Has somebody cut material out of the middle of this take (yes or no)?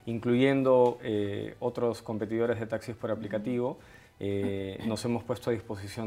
no